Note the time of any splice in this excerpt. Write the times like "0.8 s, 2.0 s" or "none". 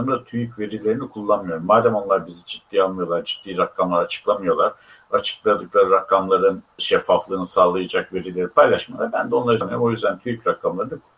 6.8 s, 9.6 s